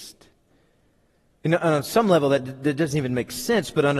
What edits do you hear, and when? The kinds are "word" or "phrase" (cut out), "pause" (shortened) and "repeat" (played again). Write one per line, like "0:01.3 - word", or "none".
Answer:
none